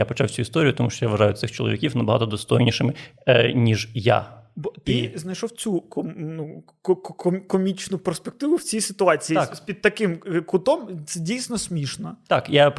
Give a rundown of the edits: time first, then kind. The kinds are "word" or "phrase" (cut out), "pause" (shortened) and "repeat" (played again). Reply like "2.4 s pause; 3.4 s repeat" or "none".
none